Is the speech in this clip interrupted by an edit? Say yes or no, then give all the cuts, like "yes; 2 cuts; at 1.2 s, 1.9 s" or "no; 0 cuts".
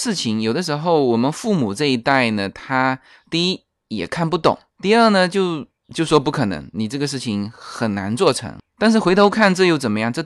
no; 0 cuts